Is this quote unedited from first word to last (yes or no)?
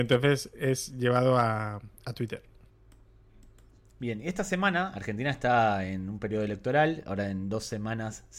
yes